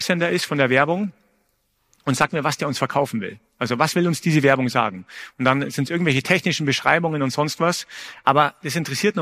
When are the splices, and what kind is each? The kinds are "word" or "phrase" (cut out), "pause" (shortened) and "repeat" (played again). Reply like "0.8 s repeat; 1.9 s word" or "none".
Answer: none